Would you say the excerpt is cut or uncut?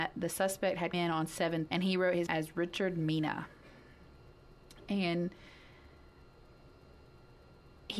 cut